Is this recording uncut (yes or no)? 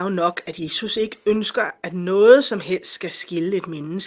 yes